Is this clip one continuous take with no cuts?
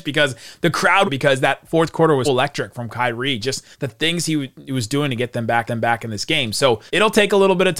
no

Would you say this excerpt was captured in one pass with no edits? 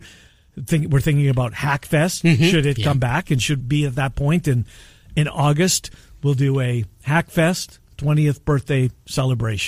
no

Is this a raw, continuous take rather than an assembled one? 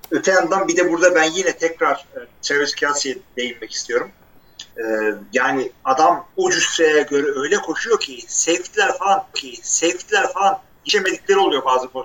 no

